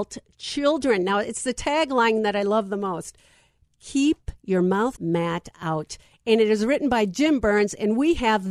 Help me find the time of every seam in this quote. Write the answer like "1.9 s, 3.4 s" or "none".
4.9 s